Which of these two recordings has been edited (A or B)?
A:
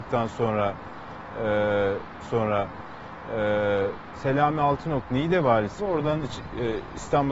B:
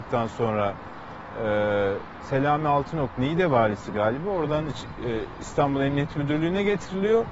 A